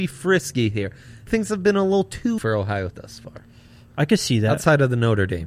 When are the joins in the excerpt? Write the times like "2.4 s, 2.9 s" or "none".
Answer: 1.3 s, 2.4 s, 2.9 s